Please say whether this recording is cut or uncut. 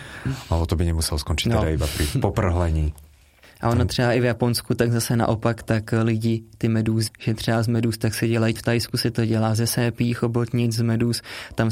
cut